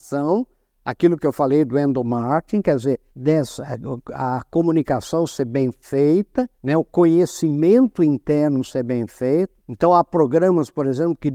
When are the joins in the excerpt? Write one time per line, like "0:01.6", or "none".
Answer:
0:03.1
0:06.6
0:09.6